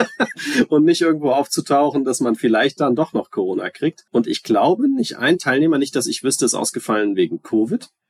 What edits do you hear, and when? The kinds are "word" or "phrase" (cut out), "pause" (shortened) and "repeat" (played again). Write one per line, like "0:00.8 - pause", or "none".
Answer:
0:04.1 - pause